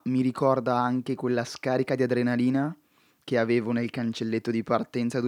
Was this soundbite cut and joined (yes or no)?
no